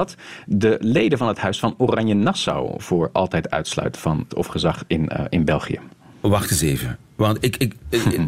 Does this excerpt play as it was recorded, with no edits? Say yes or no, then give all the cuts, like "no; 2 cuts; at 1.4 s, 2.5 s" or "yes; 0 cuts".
no; 2 cuts; at 4.3 s, 6.1 s